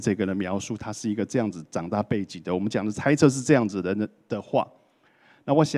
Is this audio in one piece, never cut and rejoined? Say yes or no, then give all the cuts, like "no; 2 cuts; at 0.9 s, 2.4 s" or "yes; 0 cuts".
yes; 0 cuts